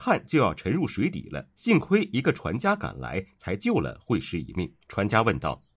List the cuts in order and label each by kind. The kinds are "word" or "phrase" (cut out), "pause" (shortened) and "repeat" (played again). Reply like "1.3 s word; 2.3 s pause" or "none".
1.5 s pause; 4.8 s pause